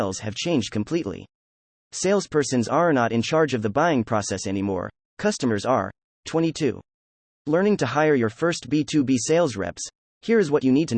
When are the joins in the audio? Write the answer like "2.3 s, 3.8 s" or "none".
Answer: none